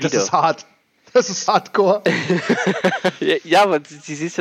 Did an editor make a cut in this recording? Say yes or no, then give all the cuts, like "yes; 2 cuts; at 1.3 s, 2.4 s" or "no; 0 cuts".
yes; 1 cut; at 1.5 s